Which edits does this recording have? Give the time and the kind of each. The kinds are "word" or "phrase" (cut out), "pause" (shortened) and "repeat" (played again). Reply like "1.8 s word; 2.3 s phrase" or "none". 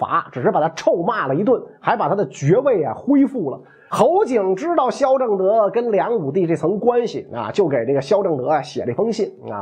none